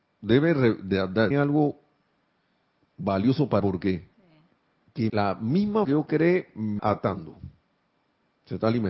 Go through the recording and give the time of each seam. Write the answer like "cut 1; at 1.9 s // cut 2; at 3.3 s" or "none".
cut 1; at 1.3 s // cut 2; at 3.6 s // cut 3; at 4.1 s // cut 4; at 5.1 s // cut 5; at 5.8 s // cut 6; at 6.8 s

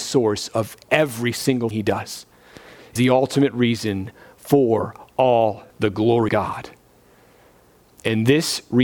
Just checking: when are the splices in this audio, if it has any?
cut 1; at 1.7 s // cut 2; at 3.0 s // cut 3; at 5.7 s // cut 4; at 6.3 s

